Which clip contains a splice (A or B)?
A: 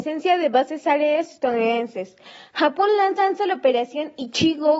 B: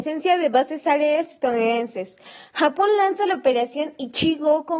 A